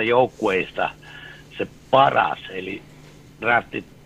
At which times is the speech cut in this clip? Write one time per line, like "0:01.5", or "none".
none